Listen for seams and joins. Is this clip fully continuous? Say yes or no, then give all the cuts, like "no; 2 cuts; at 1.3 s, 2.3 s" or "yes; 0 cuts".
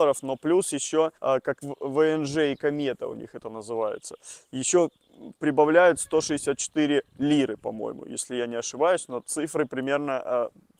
no; 2 cuts; at 1.2 s, 1.6 s